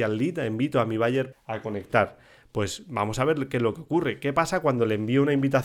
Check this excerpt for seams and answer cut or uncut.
cut